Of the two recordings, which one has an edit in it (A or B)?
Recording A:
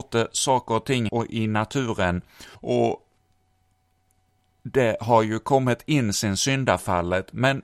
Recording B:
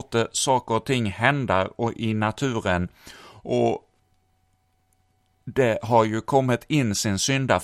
A